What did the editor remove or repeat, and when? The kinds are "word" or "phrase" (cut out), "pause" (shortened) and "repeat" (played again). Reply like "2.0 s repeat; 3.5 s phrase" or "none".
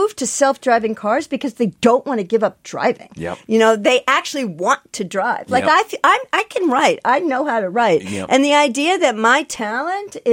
none